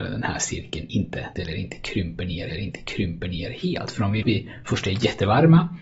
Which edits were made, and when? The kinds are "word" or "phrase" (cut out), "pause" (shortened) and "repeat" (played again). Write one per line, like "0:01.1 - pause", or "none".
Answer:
0:01.3 - phrase
0:02.5 - repeat
0:04.2 - phrase